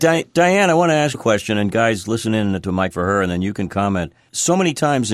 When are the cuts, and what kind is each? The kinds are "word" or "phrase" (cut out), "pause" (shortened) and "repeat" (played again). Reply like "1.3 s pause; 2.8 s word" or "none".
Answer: 1.1 s word; 2.9 s word